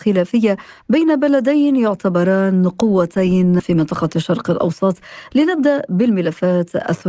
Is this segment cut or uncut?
cut